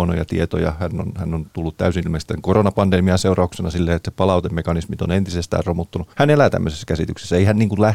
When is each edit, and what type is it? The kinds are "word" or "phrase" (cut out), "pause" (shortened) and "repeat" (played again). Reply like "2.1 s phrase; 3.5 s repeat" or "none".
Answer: 2.0 s word; 4.0 s word; 6.1 s pause

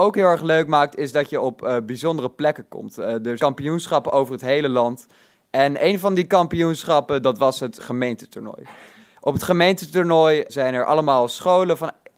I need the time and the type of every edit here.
3.4 s word; 7.8 s word; 10.5 s word

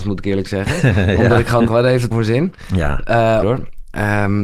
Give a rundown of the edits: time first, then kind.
1.7 s word; 2.1 s word; 3.4 s phrase

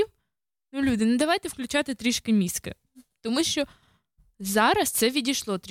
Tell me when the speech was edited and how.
none

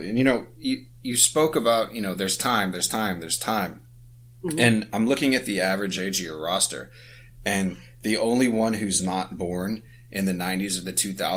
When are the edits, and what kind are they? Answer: none

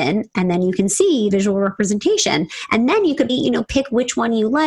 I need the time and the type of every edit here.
1.3 s word; 3.3 s word

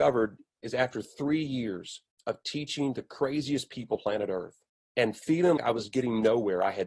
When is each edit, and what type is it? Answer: 2.1 s pause; 4.0 s word; 4.7 s pause; 5.6 s word

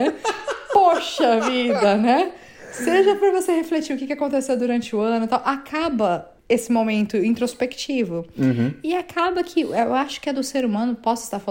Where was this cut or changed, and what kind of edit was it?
6.4 s pause

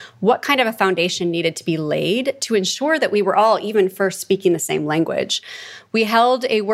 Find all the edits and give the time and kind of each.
none

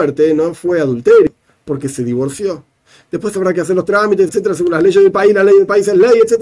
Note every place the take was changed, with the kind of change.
4.3 s word

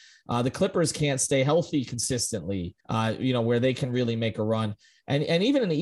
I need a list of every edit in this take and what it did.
2.8 s pause

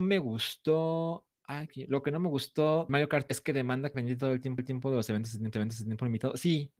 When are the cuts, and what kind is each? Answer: 1.7 s phrase; 2.9 s phrase; 3.3 s word; 3.9 s word; 4.6 s repeat; 5.5 s repeat

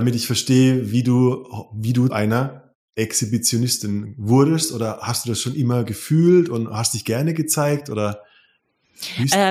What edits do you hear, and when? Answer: 2.1 s word

